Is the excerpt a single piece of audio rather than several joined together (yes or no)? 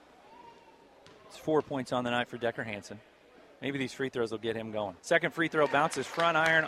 no